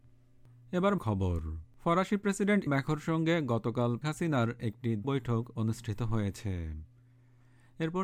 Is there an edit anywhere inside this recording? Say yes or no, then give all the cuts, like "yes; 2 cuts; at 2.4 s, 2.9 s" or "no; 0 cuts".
yes; 5 cuts; at 1.0 s, 1.7 s, 2.7 s, 4.0 s, 5.0 s